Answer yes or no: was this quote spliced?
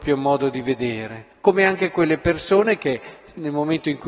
yes